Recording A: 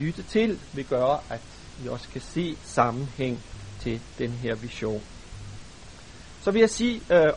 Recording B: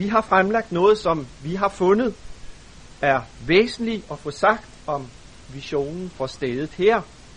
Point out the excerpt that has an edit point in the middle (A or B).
A